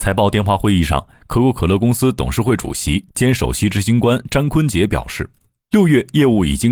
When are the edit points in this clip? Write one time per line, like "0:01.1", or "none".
none